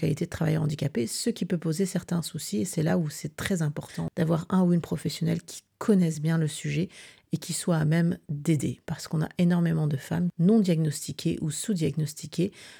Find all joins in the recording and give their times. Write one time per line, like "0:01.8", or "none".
none